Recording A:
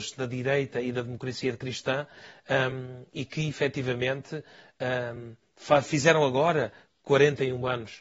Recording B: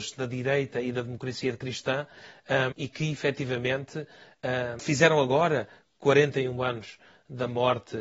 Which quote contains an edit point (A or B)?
B